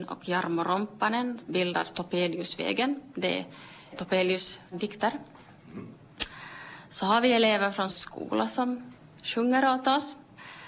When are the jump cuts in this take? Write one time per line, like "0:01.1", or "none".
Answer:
0:01.4
0:03.9
0:04.7
0:07.9